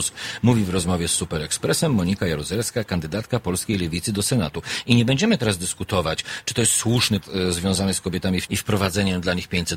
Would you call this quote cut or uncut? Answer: cut